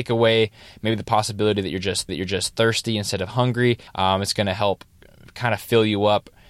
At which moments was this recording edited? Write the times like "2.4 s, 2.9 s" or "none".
2.1 s, 3.9 s